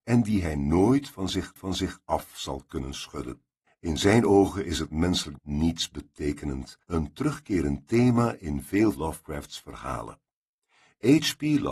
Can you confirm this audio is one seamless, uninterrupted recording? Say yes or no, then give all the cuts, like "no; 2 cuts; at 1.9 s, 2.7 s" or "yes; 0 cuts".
no; 4 cuts; at 1.6 s, 5.4 s, 6.8 s, 8.9 s